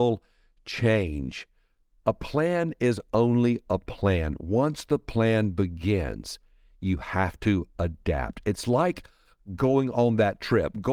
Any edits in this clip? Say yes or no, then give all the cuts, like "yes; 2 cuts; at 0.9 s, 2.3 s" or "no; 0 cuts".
no; 0 cuts